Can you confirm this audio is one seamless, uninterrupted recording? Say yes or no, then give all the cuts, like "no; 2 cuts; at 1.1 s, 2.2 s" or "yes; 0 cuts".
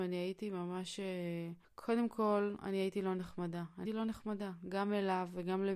no; 2 cuts; at 1.6 s, 3.9 s